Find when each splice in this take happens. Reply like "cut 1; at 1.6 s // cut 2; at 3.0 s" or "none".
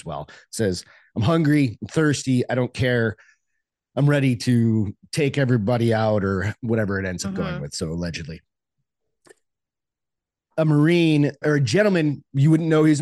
cut 1; at 11.4 s